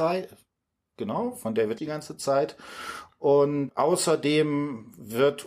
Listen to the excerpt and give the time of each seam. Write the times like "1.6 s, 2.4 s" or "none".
1.8 s, 3.7 s